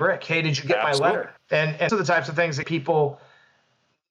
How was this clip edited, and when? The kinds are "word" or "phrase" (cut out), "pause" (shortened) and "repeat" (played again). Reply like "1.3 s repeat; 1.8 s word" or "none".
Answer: 1.4 s pause; 1.9 s word; 2.6 s word